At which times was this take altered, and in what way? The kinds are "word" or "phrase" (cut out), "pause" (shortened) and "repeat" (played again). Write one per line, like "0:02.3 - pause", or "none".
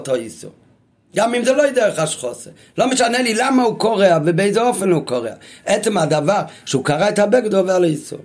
none